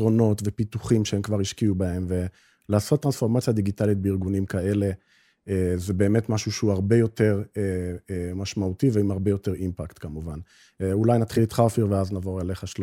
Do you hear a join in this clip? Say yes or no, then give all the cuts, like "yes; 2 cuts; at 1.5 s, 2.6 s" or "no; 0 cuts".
no; 0 cuts